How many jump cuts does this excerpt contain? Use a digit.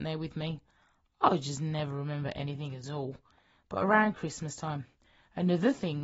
0